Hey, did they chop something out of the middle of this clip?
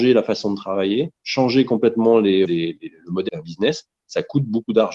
yes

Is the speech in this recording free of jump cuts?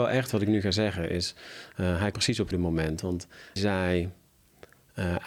no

